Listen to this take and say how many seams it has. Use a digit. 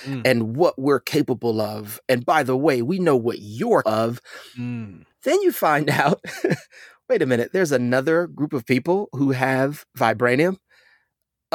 2